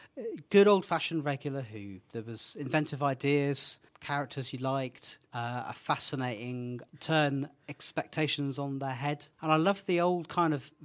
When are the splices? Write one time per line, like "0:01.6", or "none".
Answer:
0:03.9
0:05.3
0:06.9
0:09.3